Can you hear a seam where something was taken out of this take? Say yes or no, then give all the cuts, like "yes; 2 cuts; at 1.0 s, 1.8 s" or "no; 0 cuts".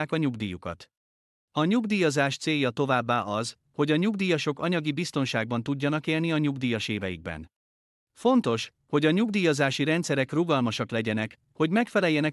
no; 0 cuts